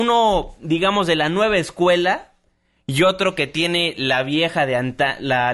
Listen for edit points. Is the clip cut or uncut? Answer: uncut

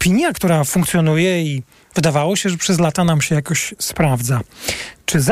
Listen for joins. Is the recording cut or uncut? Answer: uncut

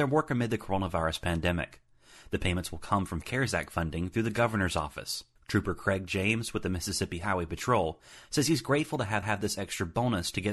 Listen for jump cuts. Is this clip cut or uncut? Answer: cut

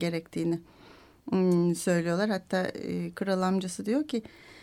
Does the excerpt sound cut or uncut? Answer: uncut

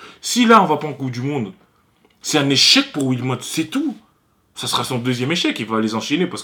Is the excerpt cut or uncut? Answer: uncut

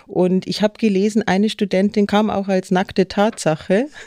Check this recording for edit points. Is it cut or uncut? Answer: uncut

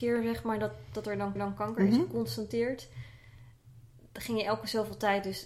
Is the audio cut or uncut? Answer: cut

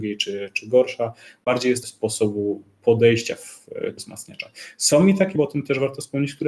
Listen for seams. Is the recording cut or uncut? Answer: cut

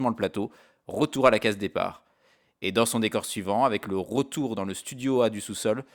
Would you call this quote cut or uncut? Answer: uncut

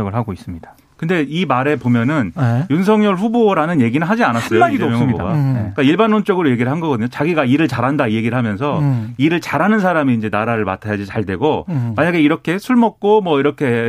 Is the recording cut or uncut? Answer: uncut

